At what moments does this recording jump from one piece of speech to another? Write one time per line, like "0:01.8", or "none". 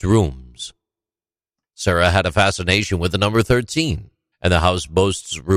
0:04.3